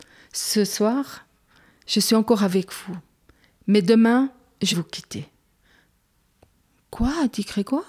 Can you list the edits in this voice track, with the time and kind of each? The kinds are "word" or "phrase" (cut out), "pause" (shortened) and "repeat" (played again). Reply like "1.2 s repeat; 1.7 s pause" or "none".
4.7 s word